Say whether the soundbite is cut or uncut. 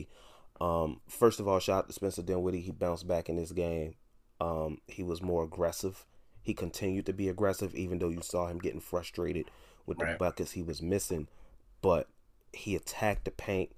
uncut